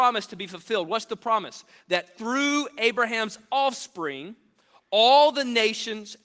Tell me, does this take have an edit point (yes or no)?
no